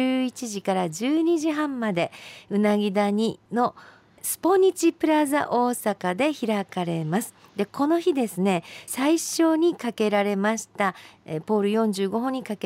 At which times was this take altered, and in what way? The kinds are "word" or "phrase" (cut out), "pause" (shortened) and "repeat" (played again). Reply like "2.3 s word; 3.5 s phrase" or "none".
8.9 s phrase